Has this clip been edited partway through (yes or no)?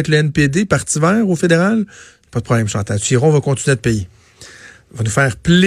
no